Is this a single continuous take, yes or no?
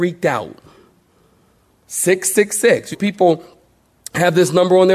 no